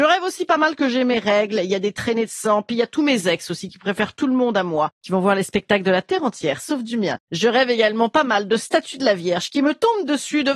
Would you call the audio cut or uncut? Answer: uncut